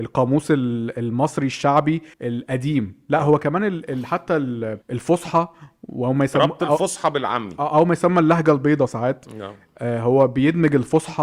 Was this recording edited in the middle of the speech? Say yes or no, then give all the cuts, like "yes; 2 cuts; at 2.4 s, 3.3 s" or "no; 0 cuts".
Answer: yes; 2 cuts; at 2.1 s, 4.8 s